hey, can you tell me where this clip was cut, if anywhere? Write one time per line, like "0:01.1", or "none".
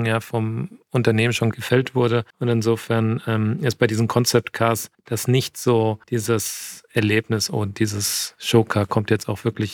0:02.3
0:04.9
0:06.0